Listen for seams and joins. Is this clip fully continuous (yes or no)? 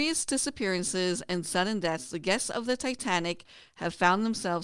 yes